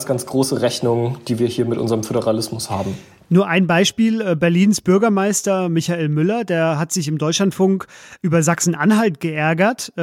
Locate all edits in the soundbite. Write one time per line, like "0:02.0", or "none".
none